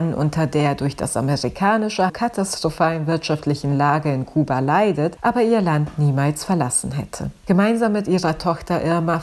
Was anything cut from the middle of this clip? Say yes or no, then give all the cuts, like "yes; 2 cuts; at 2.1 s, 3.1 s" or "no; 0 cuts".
yes; 1 cut; at 2.1 s